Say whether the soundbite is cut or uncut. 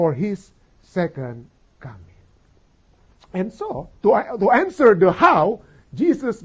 cut